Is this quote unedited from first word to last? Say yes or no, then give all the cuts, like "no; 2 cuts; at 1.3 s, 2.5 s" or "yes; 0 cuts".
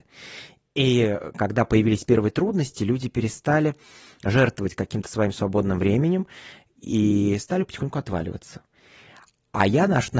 yes; 0 cuts